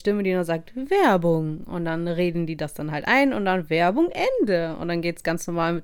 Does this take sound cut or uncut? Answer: uncut